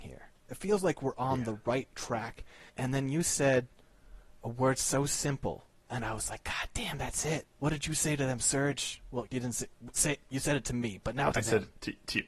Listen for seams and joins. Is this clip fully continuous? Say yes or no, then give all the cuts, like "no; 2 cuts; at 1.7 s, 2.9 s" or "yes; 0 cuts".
no; 4 cuts; at 2.7 s, 7.5 s, 9.3 s, 11.3 s